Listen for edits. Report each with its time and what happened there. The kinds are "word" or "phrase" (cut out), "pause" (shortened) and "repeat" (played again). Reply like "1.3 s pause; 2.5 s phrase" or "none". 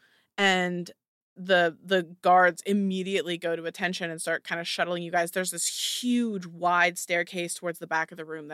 none